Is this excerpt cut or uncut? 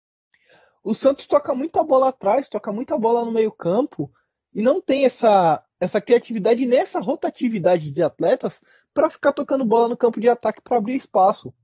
uncut